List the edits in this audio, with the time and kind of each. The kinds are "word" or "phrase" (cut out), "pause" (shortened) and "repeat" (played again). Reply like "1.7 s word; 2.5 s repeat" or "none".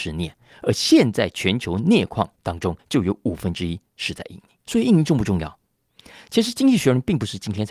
2.4 s word; 2.8 s pause; 4.6 s pause